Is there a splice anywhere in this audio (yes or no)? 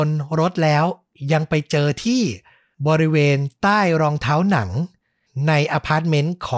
no